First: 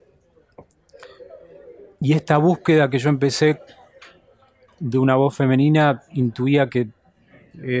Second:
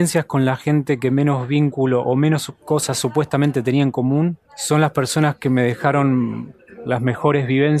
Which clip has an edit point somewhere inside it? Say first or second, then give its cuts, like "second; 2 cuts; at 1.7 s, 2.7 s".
second; 1 cut; at 4.5 s